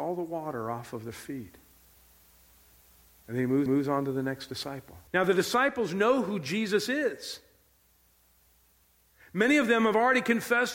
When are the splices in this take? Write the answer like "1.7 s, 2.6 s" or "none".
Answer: 3.7 s, 5.1 s